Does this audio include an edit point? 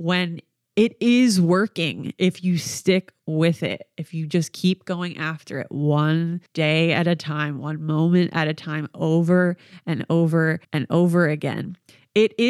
yes; 2 cuts; at 6.5 s, 10.6 s

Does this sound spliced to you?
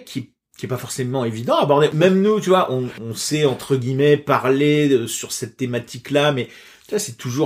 no; 0 cuts

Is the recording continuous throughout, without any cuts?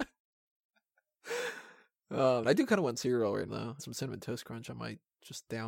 no; 3 cuts; at 2.4 s, 3.5 s, 3.8 s

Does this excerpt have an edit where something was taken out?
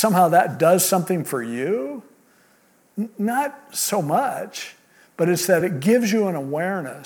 no; 0 cuts

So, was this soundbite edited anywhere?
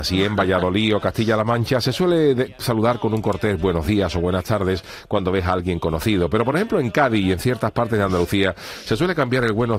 no; 0 cuts

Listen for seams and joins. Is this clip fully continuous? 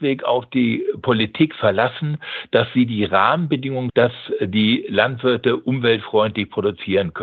no; 1 cut; at 3.9 s

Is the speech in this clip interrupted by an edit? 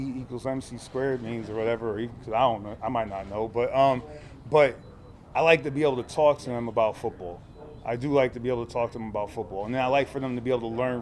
no; 0 cuts

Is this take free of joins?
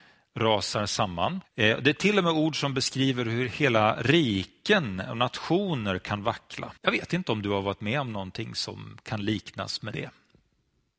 no; 2 cuts; at 1.4 s, 6.8 s

